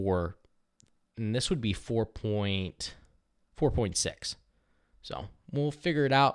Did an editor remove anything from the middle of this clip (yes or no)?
no